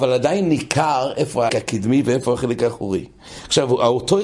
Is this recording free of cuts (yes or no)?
no